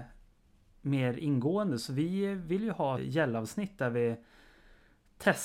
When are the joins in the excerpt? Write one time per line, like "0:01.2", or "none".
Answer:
0:03.0